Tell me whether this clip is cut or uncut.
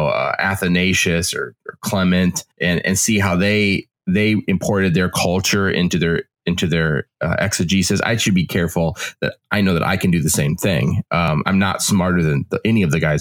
cut